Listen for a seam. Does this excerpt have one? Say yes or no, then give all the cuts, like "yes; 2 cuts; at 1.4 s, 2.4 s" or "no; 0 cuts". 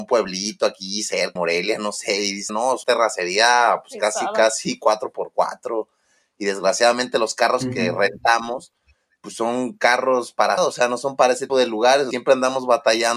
yes; 6 cuts; at 1.4 s, 2.5 s, 2.8 s, 10.6 s, 11.5 s, 12.1 s